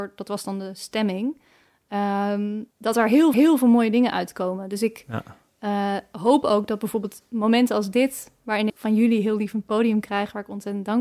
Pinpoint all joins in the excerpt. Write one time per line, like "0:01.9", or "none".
0:02.7
0:03.3
0:08.7